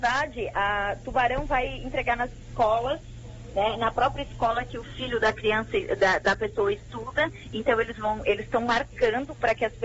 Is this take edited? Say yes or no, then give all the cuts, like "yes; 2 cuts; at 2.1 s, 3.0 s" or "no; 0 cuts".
no; 0 cuts